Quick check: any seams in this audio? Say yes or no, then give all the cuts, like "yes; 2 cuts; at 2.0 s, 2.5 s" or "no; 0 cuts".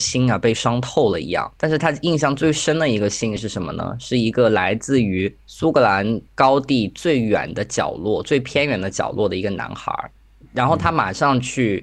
yes; 4 cuts; at 1.6 s, 5.4 s, 6.3 s, 10.2 s